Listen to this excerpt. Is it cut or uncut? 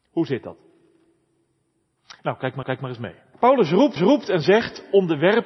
cut